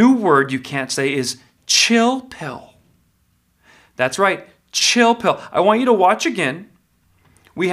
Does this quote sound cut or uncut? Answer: uncut